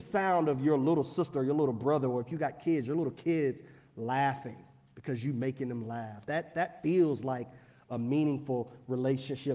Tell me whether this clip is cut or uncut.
uncut